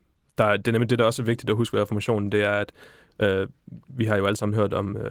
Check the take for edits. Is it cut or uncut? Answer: uncut